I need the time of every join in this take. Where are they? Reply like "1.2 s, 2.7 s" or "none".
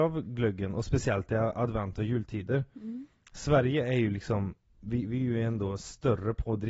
none